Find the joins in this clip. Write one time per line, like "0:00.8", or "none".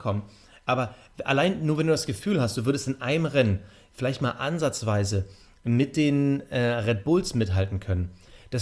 none